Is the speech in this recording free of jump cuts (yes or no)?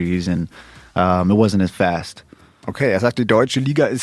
yes